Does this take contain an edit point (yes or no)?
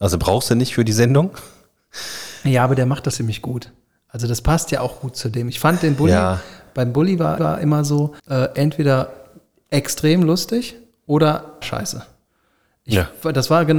yes